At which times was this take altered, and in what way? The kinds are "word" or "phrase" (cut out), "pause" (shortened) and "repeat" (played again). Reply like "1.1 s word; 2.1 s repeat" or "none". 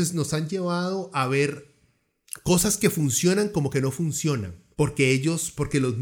4.7 s pause